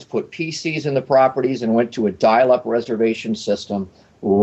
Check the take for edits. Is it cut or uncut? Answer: uncut